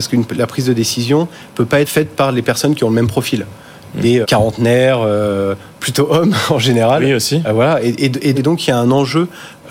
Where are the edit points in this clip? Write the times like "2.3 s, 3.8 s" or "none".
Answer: 1.8 s, 4.2 s, 5.7 s, 8.3 s